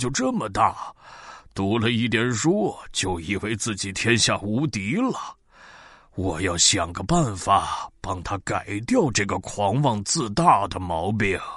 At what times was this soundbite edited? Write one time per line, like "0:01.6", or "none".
none